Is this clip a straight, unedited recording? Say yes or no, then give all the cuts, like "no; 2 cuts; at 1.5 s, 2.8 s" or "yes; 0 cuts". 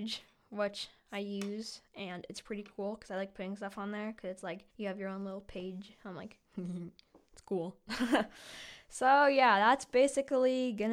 no; 1 cut; at 4.7 s